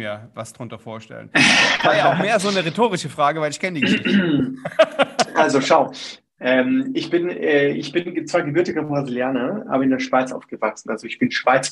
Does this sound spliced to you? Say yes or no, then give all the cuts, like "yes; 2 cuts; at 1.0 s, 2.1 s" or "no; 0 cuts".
no; 0 cuts